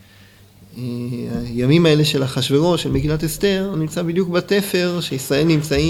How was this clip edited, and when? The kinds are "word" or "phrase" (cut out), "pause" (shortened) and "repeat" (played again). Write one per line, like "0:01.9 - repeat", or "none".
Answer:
none